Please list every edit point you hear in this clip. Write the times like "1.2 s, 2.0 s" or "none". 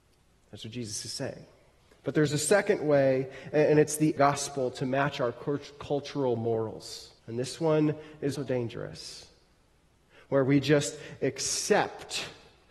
1.8 s, 4.2 s, 7.2 s, 8.3 s